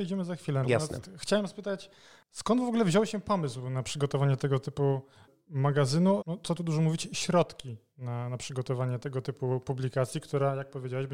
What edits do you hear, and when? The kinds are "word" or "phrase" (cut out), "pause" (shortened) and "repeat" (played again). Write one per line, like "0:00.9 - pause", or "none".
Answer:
0:06.2 - word